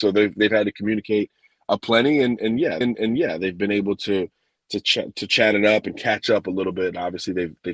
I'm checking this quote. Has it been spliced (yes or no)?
yes